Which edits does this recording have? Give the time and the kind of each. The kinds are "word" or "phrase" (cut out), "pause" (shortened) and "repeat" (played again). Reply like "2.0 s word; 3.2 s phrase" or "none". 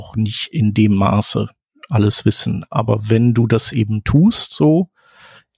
none